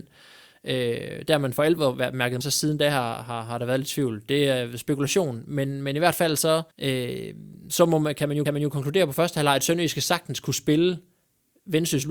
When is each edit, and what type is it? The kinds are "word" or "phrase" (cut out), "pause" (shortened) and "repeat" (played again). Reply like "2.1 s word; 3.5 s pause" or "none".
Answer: 2.4 s phrase; 6.7 s pause; 8.5 s repeat